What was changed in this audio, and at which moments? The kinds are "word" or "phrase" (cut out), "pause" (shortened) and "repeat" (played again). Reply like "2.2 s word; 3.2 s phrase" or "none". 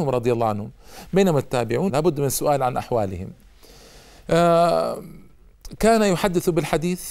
1.9 s word